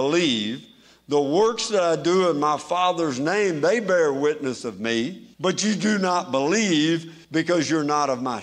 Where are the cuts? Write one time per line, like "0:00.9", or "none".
0:05.3
0:07.2